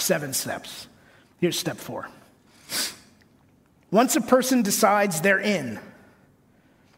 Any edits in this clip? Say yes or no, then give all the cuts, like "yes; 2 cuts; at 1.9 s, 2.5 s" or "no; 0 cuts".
no; 0 cuts